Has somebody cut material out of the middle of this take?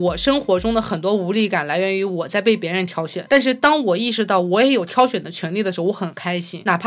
no; 0 cuts

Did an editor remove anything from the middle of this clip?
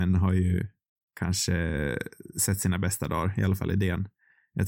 no; 0 cuts

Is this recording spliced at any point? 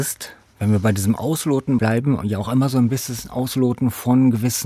no; 0 cuts

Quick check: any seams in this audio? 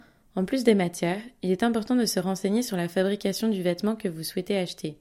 no; 0 cuts

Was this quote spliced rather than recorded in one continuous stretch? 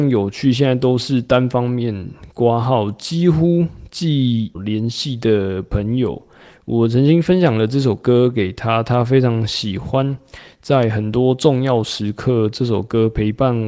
yes; 1 cut; at 4.6 s

